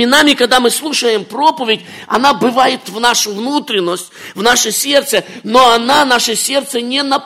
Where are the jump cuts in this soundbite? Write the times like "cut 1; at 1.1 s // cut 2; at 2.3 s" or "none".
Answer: cut 1; at 2.8 s